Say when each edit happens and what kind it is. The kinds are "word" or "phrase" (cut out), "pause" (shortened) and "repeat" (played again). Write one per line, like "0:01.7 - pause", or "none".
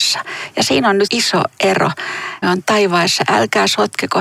0:01.1 - word
0:02.4 - phrase